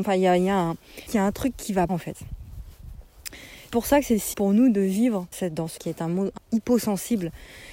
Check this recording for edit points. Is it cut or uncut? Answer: cut